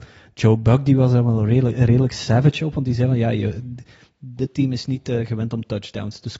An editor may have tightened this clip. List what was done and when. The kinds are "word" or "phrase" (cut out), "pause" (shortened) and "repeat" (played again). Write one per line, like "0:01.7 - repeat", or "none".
none